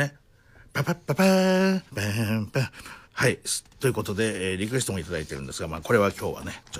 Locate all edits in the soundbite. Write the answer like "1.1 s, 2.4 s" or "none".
1.9 s, 3.0 s, 3.7 s